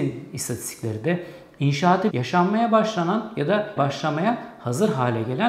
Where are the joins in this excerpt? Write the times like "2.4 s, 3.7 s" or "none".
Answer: 2.1 s, 3.8 s